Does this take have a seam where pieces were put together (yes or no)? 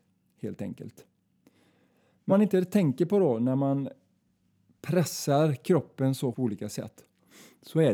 yes